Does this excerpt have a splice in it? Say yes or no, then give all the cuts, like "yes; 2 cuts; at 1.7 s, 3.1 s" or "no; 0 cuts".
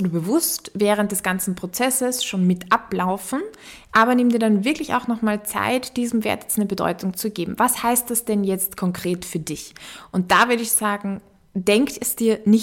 no; 0 cuts